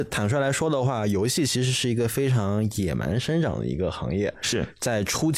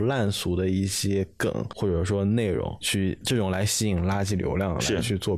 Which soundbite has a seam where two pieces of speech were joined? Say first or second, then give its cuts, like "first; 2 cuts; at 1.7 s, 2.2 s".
second; 1 cut; at 2.8 s